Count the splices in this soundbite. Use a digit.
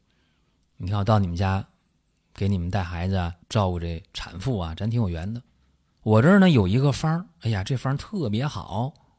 1